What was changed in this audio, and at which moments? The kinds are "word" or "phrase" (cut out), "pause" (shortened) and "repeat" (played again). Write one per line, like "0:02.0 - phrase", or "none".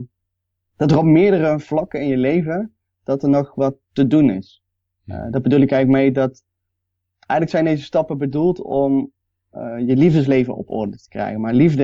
none